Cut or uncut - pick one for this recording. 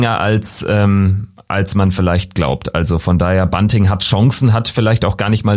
uncut